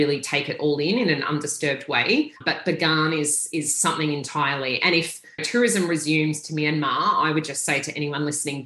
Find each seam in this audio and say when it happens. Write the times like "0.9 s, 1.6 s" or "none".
2.4 s